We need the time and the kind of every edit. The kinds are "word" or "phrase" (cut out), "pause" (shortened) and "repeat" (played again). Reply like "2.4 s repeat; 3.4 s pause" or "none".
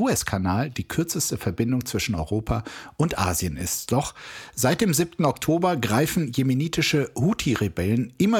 none